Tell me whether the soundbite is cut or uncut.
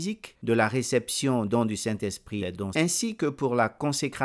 cut